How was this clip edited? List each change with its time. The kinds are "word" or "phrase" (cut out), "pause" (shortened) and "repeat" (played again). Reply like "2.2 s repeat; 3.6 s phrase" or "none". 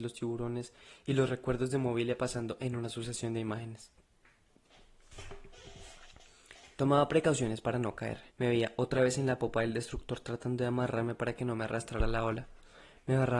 8.3 s pause